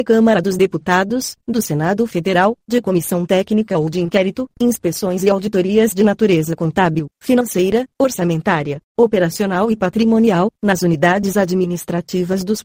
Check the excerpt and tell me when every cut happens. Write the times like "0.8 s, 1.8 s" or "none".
8.9 s